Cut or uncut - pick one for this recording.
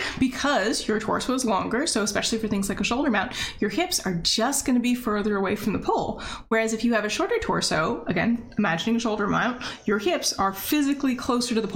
uncut